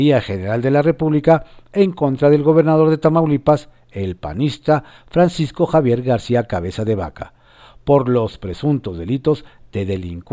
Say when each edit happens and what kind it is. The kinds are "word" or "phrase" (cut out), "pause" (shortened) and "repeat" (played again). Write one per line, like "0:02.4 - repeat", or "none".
none

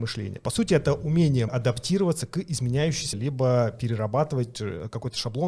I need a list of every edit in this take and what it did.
0:01.5 - word
0:03.1 - word

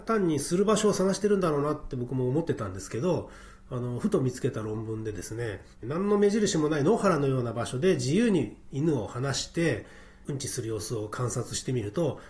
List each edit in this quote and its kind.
0:05.7 - pause

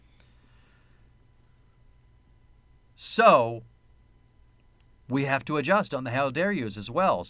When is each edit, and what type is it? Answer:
none

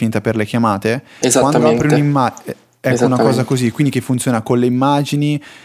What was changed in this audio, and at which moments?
none

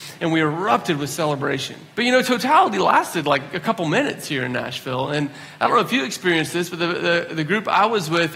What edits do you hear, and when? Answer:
0:01.9 - pause

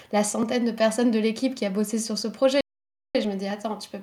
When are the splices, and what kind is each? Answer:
none

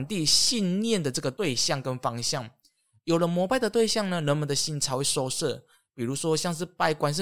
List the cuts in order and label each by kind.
none

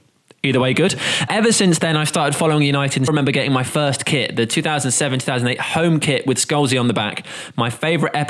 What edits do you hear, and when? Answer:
0:01.3 - word
0:03.1 - word

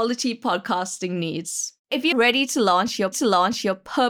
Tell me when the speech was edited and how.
0:01.8 - pause
0:02.1 - word
0:03.1 - repeat

